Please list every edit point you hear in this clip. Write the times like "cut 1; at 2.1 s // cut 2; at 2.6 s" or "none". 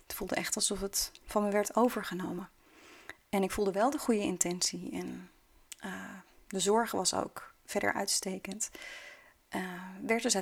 none